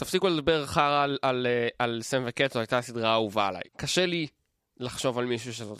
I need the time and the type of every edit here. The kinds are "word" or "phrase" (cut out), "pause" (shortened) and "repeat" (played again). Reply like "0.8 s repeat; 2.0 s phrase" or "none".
3.7 s pause

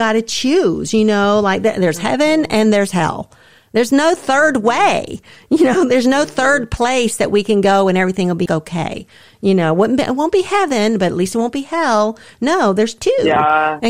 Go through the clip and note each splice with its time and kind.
8.5 s word

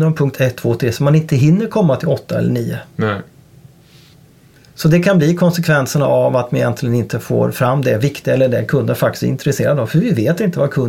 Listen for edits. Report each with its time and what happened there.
none

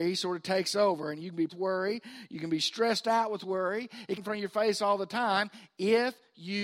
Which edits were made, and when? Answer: 1.5 s phrase; 4.2 s phrase

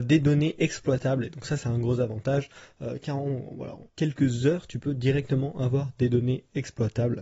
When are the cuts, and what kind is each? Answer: 3.9 s pause

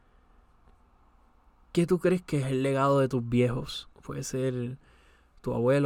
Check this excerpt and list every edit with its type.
3.9 s pause

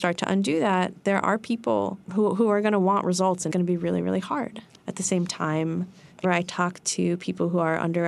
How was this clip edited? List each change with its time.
2.0 s pause; 3.5 s phrase; 6.2 s phrase

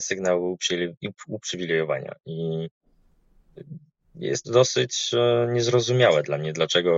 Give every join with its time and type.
4.4 s word

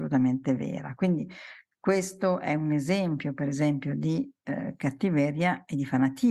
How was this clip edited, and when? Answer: none

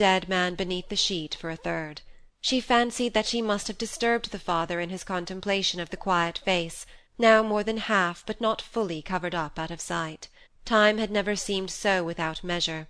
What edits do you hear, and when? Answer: 2.3 s pause; 7.1 s pause; 10.5 s pause

